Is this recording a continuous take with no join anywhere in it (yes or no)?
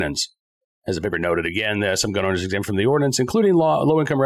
yes